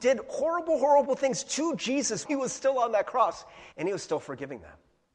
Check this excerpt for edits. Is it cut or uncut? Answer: cut